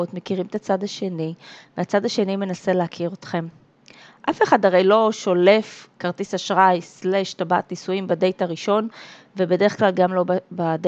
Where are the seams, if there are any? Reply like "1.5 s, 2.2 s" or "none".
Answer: none

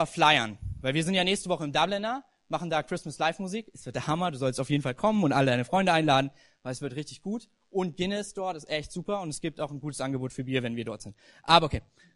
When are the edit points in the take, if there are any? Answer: none

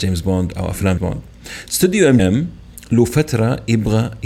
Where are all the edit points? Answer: 1.0 s, 2.2 s

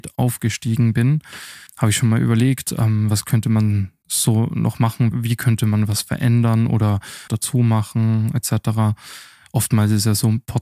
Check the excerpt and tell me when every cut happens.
1.7 s, 5.1 s, 7.3 s

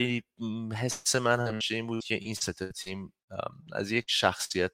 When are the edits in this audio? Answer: none

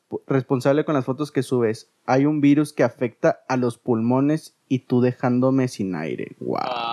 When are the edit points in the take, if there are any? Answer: 4.6 s

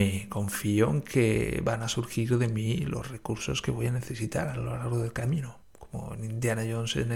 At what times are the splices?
5.6 s

